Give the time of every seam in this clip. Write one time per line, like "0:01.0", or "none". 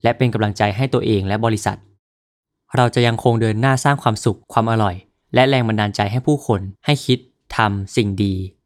0:04.4
0:06.8